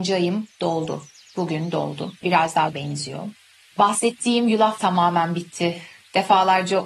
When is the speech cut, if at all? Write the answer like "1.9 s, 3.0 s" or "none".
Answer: 2.2 s, 2.7 s, 4.8 s